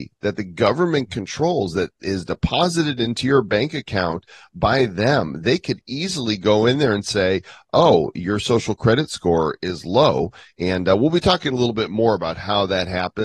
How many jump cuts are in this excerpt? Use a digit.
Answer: 0